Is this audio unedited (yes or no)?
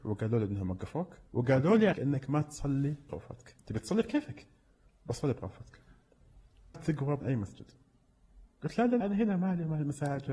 no